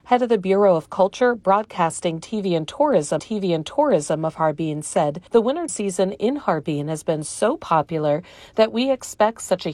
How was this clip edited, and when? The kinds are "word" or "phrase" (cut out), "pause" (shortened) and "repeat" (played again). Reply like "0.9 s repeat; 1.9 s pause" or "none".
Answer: 3.2 s repeat; 5.3 s pause; 5.7 s word